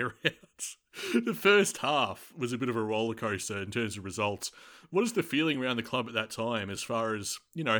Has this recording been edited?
no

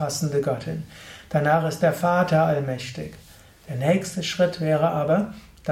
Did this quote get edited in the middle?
no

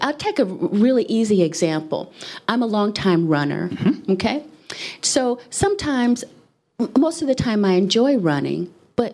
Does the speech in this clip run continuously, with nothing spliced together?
yes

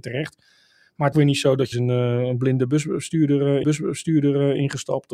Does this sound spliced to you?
yes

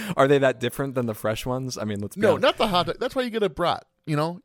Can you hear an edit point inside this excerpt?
no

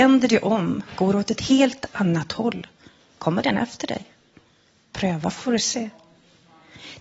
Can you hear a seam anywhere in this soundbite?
no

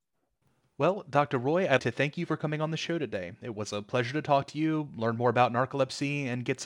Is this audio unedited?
no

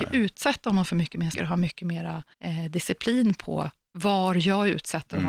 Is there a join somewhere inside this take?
yes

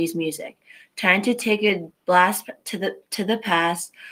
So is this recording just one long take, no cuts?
no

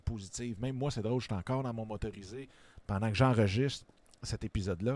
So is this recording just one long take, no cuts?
yes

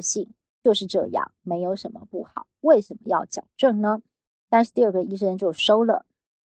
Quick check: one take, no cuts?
yes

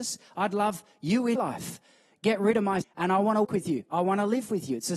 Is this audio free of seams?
no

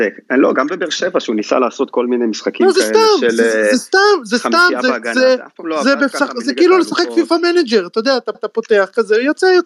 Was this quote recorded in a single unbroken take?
no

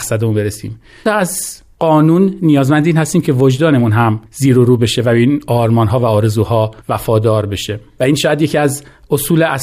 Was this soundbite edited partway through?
yes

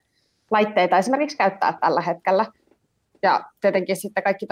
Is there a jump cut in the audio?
no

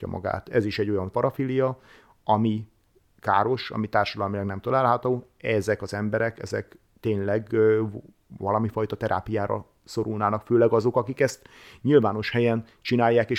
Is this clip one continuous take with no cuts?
no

